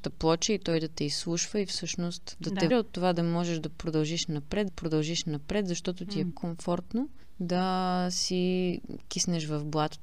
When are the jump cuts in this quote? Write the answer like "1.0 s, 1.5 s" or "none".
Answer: 2.7 s, 4.7 s, 6.3 s